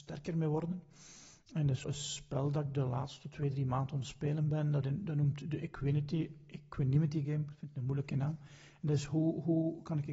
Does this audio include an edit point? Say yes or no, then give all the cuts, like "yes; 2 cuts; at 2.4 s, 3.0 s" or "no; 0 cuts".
yes; 1 cut; at 1.8 s